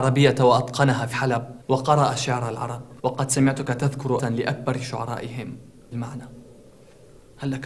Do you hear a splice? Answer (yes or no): yes